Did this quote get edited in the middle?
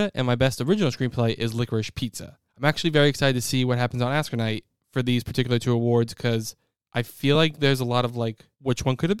no; 0 cuts

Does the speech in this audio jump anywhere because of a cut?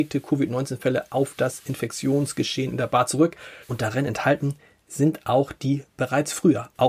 yes; 1 cut; at 3.6 s

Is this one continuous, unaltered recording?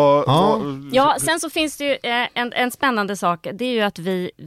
yes; 0 cuts

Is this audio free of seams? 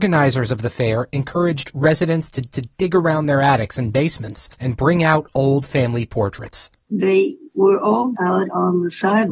no; 3 cuts; at 2.5 s, 4.5 s, 8.1 s

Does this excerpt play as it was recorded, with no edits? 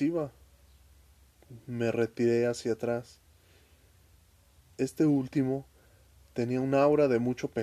yes; 0 cuts

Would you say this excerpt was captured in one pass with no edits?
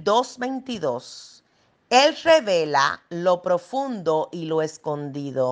yes; 0 cuts

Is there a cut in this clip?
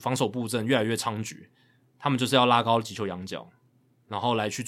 no; 0 cuts

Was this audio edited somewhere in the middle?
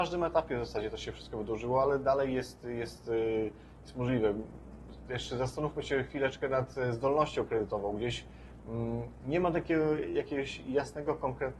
no; 0 cuts

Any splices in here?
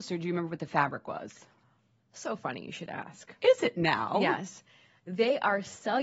no; 0 cuts

